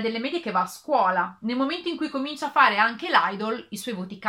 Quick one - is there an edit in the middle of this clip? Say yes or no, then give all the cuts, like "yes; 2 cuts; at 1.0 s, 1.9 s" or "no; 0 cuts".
no; 0 cuts